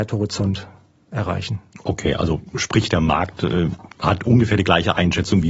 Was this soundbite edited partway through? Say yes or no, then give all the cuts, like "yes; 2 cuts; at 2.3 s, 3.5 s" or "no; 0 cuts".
no; 0 cuts